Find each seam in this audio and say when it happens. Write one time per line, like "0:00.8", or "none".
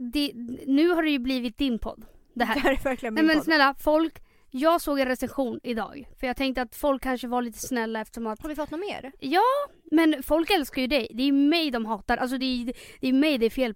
none